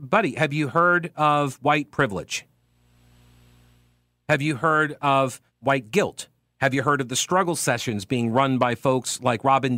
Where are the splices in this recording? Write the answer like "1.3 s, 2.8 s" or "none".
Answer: 5.5 s